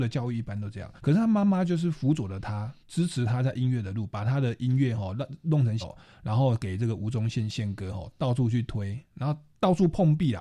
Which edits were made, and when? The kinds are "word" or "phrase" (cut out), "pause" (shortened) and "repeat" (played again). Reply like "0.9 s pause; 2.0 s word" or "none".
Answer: 1.0 s pause; 2.8 s pause; 5.8 s word